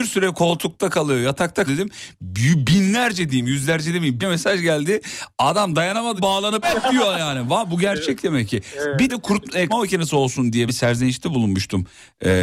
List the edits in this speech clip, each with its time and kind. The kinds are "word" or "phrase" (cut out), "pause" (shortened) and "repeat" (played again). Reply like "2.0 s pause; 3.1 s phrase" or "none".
1.7 s word; 4.2 s word; 6.2 s word; 6.6 s word; 9.1 s word; 9.7 s word; 10.7 s word